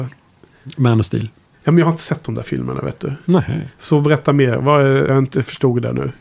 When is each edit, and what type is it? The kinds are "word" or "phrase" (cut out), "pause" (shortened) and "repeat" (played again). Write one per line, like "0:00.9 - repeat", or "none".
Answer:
0:05.1 - word